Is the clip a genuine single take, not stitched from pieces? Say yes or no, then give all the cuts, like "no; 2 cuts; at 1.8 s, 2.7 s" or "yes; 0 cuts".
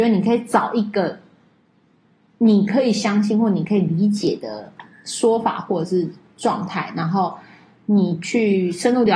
yes; 0 cuts